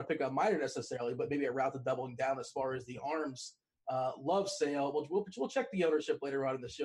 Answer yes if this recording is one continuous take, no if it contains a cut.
yes